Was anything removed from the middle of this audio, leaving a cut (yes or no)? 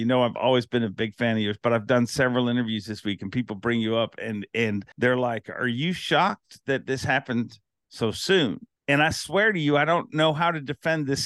yes